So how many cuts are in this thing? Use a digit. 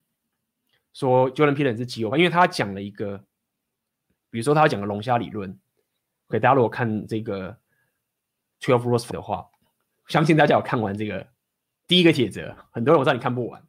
1